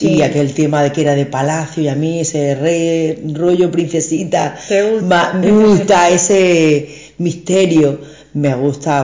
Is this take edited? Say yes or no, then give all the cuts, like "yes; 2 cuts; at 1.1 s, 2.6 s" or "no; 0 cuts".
yes; 1 cut; at 5.4 s